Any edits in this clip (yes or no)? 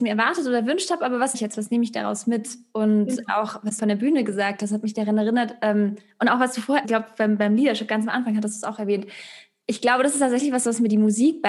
yes